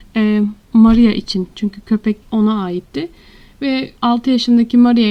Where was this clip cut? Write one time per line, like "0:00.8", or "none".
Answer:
0:02.2
0:04.0